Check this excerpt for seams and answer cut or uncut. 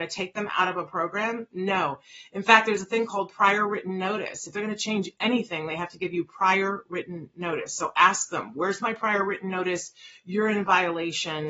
uncut